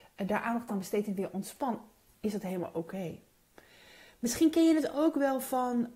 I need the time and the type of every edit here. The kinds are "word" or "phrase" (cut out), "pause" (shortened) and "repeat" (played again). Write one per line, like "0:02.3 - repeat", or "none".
none